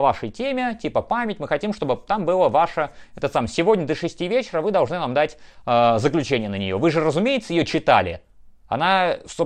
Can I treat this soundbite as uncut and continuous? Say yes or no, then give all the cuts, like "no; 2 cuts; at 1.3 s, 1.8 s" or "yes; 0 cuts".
yes; 0 cuts